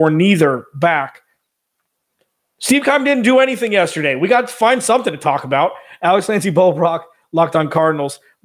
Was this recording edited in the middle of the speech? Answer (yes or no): no